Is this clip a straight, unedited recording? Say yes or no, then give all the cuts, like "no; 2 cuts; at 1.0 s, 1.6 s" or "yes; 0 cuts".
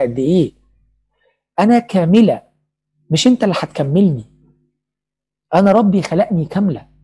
yes; 0 cuts